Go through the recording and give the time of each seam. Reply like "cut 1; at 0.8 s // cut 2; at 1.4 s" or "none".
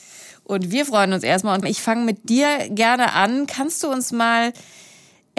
cut 1; at 1.6 s

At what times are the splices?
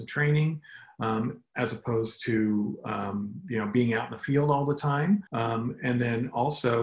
cut 1; at 5.3 s

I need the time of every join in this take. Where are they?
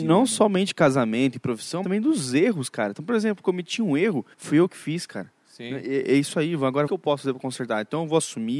cut 1; at 1.8 s // cut 2; at 4.3 s // cut 3; at 6.9 s

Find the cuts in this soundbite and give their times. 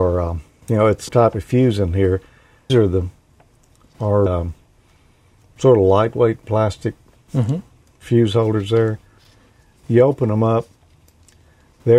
cut 1; at 1.1 s // cut 2; at 2.7 s // cut 3; at 4.3 s

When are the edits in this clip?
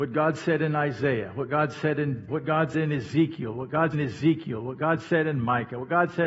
cut 1; at 2.3 s // cut 2; at 2.7 s // cut 3; at 3.9 s

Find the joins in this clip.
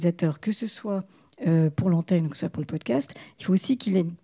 none

